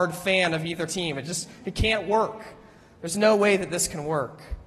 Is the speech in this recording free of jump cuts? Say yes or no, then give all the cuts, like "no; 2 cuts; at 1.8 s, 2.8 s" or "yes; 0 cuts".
yes; 0 cuts